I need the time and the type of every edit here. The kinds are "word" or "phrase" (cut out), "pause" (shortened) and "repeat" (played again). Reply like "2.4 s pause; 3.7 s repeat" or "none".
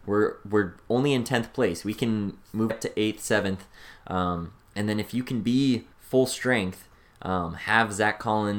2.7 s phrase; 5.9 s pause